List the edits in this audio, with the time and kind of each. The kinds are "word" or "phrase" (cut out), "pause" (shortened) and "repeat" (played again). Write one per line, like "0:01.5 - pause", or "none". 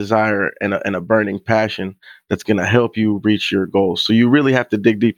none